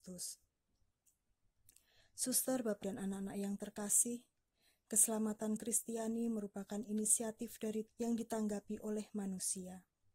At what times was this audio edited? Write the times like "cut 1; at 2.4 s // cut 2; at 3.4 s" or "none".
cut 1; at 2.8 s // cut 2; at 5.6 s // cut 3; at 7.9 s